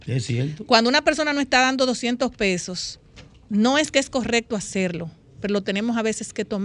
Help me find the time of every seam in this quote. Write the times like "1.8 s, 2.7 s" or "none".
none